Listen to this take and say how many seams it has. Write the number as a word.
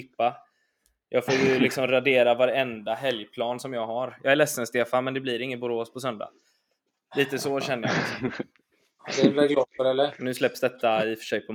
zero